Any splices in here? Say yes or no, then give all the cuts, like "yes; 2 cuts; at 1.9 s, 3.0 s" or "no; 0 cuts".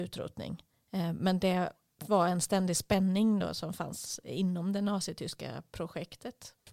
no; 0 cuts